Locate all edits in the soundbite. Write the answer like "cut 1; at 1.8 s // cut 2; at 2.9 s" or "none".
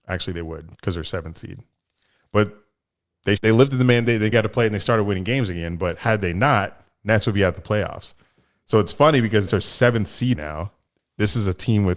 cut 1; at 3.4 s // cut 2; at 4.3 s // cut 3; at 9.5 s // cut 4; at 10.3 s

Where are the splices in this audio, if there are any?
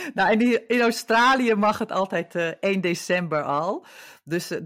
none

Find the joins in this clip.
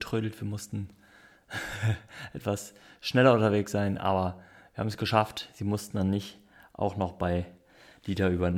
none

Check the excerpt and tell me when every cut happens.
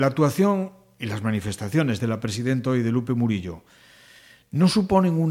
none

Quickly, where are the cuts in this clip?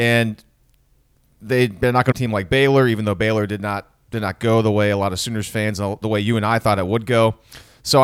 cut 1; at 2.1 s

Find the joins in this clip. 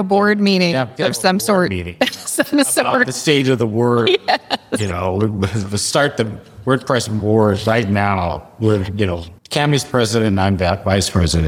cut 1; at 9.4 s

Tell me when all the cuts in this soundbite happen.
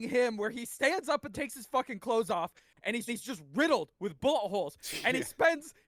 cut 1; at 1.3 s // cut 2; at 3.1 s

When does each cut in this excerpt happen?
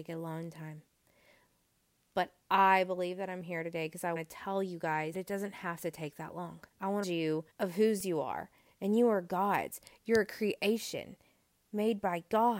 cut 1; at 2.4 s // cut 2; at 4.2 s // cut 3; at 5.1 s // cut 4; at 6.7 s // cut 5; at 7.0 s // cut 6; at 7.5 s

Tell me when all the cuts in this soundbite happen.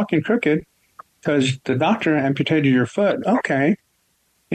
none

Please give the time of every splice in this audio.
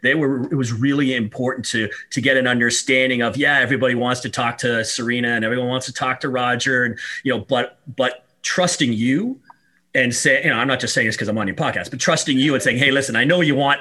none

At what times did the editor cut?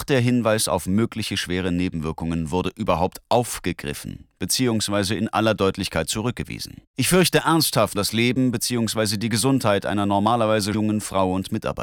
cut 1; at 6.9 s // cut 2; at 7.9 s // cut 3; at 10.7 s

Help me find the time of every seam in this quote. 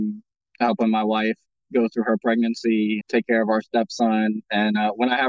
cut 1; at 3.0 s

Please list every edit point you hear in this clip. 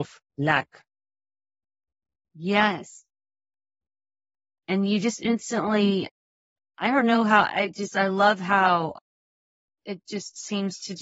none

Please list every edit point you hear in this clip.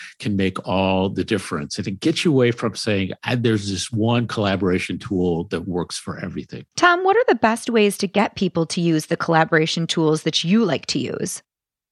cut 1; at 6.7 s

